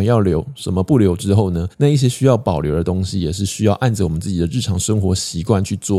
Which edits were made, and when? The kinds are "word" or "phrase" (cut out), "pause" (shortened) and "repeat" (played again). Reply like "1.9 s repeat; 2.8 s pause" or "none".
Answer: 1.7 s pause